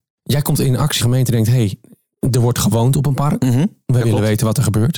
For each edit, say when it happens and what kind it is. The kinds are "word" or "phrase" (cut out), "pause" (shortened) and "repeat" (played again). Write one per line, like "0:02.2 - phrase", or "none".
0:01.0 - phrase